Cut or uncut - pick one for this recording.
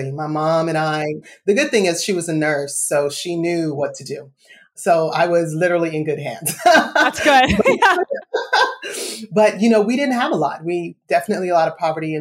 uncut